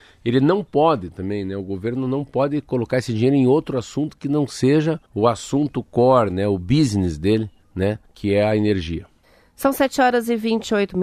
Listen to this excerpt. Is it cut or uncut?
cut